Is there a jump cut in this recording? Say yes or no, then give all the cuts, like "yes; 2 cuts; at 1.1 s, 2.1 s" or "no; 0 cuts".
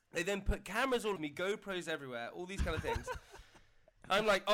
yes; 1 cut; at 1.1 s